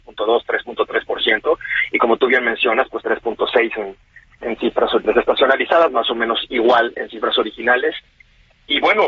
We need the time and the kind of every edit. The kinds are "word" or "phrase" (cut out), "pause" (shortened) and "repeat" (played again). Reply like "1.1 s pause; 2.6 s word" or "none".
3.0 s phrase; 4.4 s word; 5.0 s word